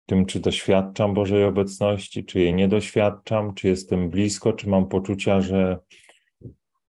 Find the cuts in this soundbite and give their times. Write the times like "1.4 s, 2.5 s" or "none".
none